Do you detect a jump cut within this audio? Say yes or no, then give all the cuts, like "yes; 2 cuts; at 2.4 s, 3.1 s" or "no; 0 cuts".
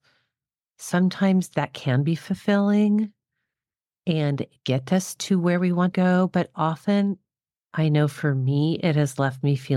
yes; 1 cut; at 5.9 s